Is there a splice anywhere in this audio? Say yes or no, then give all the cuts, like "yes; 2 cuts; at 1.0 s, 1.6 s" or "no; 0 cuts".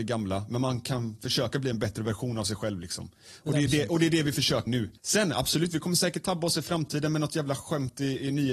yes; 2 cuts; at 4.7 s, 5.0 s